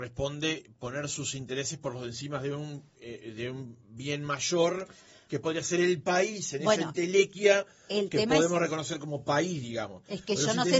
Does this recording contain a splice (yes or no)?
no